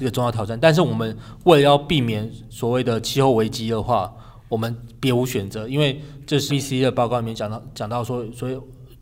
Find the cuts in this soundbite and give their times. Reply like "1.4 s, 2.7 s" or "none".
6.5 s